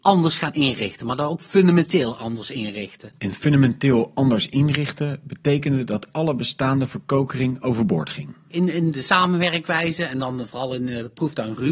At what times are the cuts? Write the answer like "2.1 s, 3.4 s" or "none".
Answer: 3.2 s